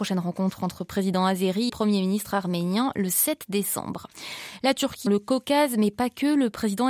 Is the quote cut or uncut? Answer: cut